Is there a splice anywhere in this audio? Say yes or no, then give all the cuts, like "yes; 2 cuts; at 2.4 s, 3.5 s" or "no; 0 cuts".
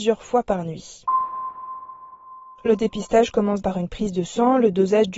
yes; 1 cut; at 3.6 s